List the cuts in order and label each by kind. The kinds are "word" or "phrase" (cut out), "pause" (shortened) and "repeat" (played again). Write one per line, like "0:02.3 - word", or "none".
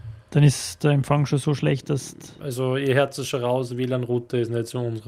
none